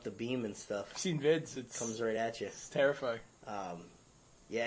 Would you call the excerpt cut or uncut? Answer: uncut